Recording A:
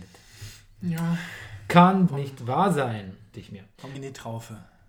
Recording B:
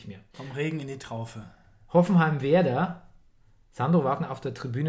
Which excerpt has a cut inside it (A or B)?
A